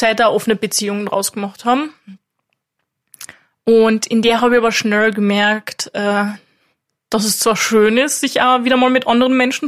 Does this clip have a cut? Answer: no; 0 cuts

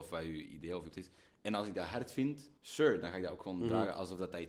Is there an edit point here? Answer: yes; 2 cuts; at 0.9 s, 2.6 s

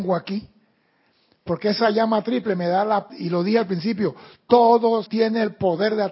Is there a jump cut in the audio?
yes; 2 cuts; at 3.1 s, 5.1 s

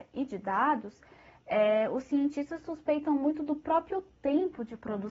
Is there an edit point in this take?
no; 0 cuts

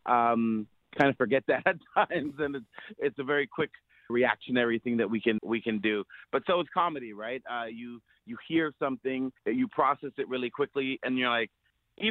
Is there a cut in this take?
yes; 4 cuts; at 4.1 s, 5.4 s, 9.4 s, 11.1 s

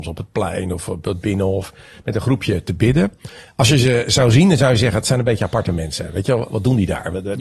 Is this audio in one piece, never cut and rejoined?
yes; 0 cuts

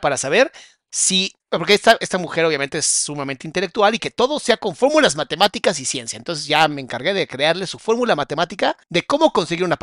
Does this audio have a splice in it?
yes; 3 cuts; at 1.4 s, 4.0 s, 8.8 s

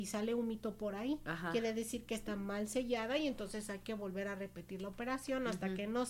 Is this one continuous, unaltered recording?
yes; 0 cuts

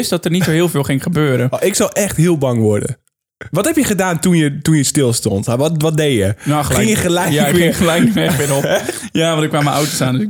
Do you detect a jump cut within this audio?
no; 0 cuts

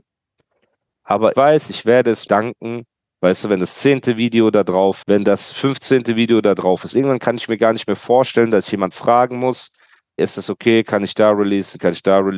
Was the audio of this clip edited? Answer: yes; 5 cuts; at 1.3 s, 2.3 s, 5.0 s, 8.9 s, 10.2 s

